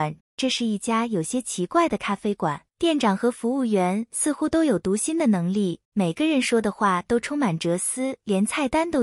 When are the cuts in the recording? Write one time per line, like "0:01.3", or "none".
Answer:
0:02.7